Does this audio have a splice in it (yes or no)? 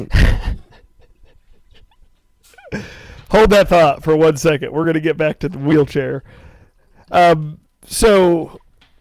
no